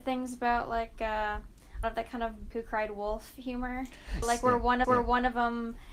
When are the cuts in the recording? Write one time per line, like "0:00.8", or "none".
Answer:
0:01.8
0:02.5
0:04.2
0:04.8